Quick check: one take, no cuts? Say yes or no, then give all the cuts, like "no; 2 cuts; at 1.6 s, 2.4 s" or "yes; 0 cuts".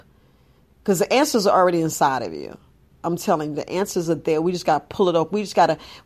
yes; 0 cuts